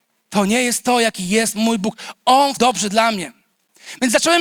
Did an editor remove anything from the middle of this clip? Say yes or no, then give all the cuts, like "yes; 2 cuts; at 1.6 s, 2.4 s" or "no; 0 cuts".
yes; 1 cut; at 2.6 s